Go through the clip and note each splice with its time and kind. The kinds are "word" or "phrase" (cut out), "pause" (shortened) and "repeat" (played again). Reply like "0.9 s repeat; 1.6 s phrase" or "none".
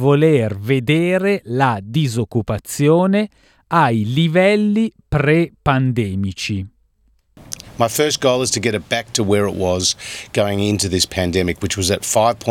none